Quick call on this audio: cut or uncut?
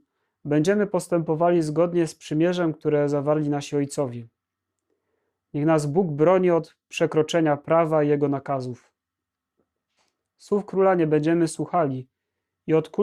uncut